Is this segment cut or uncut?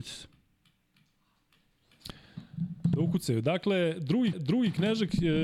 cut